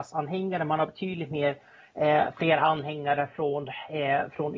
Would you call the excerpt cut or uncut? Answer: uncut